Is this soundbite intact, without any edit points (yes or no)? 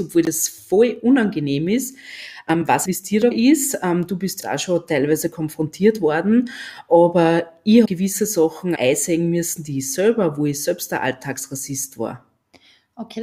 no